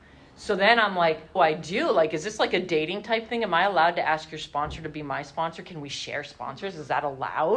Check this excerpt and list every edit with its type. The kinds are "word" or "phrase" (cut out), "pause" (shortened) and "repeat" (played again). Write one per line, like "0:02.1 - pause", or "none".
0:01.4 - phrase

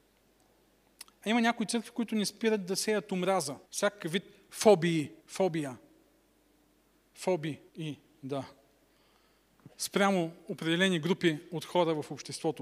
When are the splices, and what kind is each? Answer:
0:03.6 - pause
0:05.2 - pause
0:07.7 - pause
0:09.7 - pause

